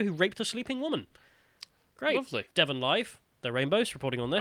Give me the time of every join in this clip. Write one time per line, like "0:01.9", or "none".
0:02.5